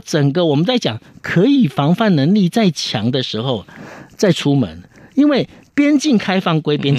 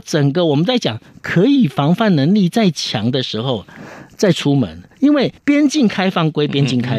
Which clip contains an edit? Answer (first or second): second